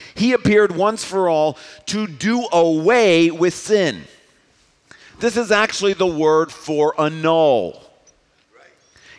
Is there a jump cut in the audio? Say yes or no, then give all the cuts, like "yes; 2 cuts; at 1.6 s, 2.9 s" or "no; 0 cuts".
no; 0 cuts